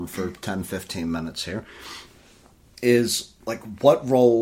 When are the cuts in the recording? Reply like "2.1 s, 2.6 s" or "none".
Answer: 3.4 s